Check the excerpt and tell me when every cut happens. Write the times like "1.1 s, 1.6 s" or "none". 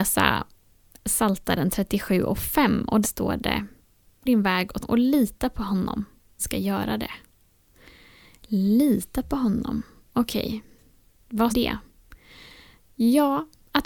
3.0 s, 4.3 s, 4.8 s, 6.4 s, 11.5 s